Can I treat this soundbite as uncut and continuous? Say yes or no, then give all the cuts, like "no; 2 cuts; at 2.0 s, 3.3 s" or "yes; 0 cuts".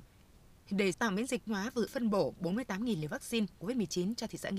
no; 4 cuts; at 0.9 s, 1.5 s, 1.9 s, 3.6 s